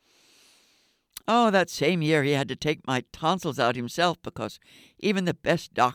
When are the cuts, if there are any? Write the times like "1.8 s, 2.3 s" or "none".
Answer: none